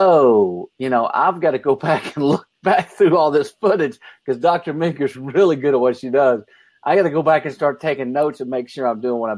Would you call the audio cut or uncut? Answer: uncut